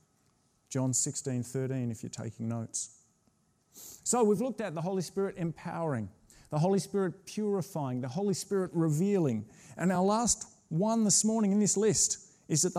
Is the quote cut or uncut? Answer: uncut